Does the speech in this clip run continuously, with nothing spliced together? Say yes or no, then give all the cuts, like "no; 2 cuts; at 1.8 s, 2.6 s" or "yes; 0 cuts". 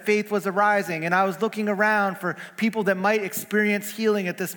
yes; 0 cuts